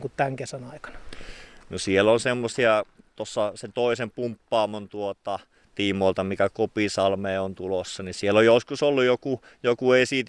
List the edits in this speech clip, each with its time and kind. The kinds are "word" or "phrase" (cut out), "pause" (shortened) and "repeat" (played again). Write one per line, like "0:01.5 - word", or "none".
none